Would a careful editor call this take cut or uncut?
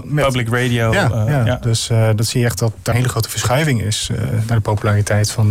cut